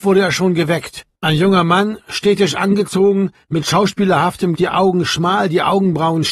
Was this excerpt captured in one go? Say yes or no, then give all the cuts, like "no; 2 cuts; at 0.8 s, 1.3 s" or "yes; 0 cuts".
no; 2 cuts; at 1.1 s, 4.5 s